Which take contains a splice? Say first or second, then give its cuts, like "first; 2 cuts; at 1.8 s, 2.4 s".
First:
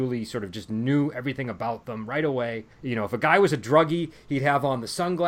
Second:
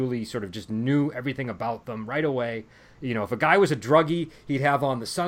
first; 1 cut; at 2.7 s